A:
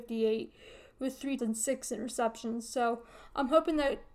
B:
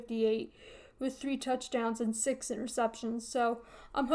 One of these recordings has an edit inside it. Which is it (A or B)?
A